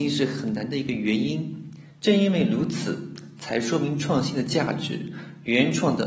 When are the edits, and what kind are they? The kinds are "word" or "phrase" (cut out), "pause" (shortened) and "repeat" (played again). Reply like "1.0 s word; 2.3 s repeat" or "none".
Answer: 1.9 s pause

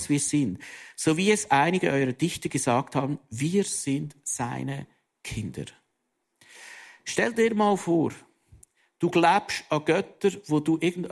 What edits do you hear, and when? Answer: none

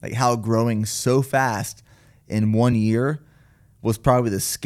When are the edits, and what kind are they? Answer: none

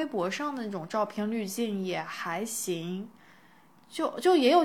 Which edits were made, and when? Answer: none

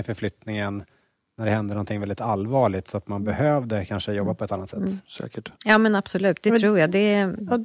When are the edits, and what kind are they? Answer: 5.6 s pause

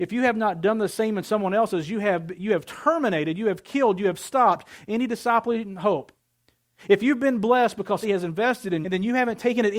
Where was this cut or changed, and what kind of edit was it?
8.0 s word; 8.8 s word

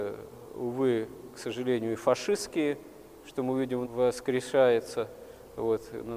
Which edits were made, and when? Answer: 3.8 s phrase

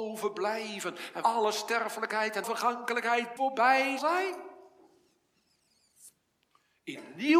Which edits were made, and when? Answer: 1.2 s word; 2.4 s word; 3.4 s word; 4.0 s word

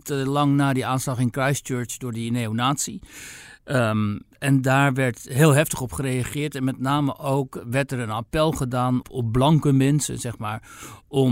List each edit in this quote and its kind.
4.4 s word; 9.0 s word

